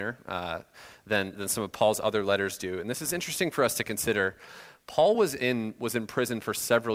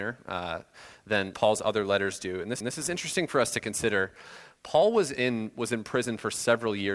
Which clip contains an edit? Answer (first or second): second